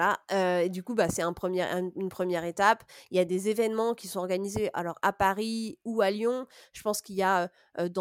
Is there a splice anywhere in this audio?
no; 0 cuts

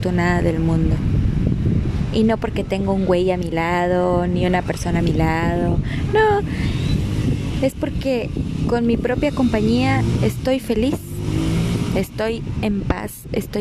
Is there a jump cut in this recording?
no; 0 cuts

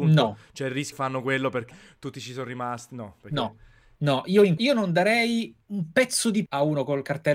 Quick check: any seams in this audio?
yes; 6 cuts; at 0.9 s, 1.7 s, 4.0 s, 4.6 s, 5.6 s, 6.5 s

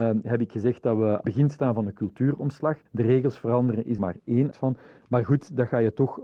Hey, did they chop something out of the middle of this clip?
yes; 4 cuts; at 1.2 s, 2.9 s, 4.0 s, 4.5 s

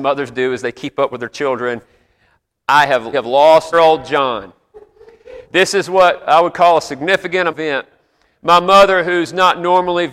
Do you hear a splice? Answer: yes; 4 cuts; at 3.1 s, 3.7 s, 5.4 s, 7.5 s

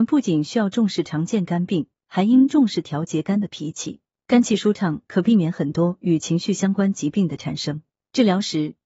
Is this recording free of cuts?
yes; 0 cuts

